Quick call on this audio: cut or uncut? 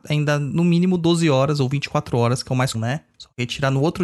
cut